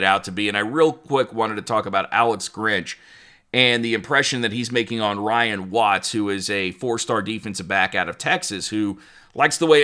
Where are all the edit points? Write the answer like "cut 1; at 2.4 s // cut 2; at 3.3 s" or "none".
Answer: none